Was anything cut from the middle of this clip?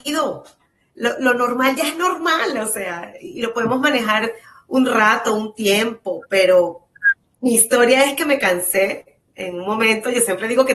yes; 1 cut; at 4.4 s

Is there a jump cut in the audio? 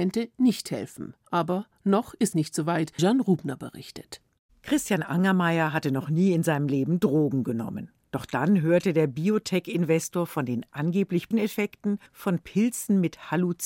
yes; 5 cuts; at 1.2 s, 2.3 s, 3.0 s, 11.3 s, 12.1 s

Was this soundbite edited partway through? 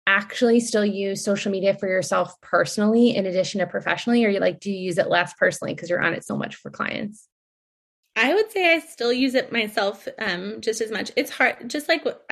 no; 0 cuts

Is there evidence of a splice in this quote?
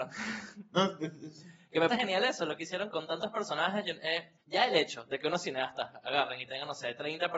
yes; 3 cuts; at 1.9 s, 2.9 s, 4.4 s

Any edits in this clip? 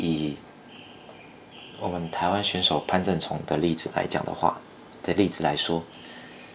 no; 0 cuts

